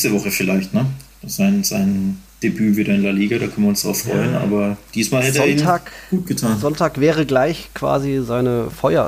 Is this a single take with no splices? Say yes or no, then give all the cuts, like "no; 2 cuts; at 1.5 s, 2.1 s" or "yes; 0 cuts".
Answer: no; 1 cut; at 2.3 s